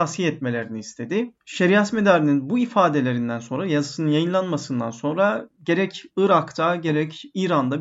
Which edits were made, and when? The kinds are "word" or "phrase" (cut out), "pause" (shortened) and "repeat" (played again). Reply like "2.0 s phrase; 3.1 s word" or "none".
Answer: 1.4 s pause